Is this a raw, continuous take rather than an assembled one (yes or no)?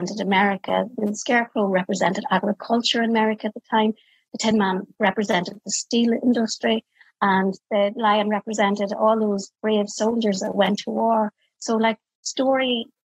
yes